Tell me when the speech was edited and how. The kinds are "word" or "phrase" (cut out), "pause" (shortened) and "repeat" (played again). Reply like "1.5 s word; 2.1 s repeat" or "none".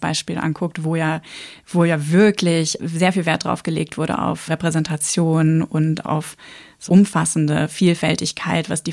2.8 s word; 4.5 s word; 6.0 s word; 6.9 s word